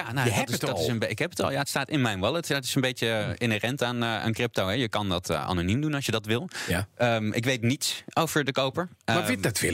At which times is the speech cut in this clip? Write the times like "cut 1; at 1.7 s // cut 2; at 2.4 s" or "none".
none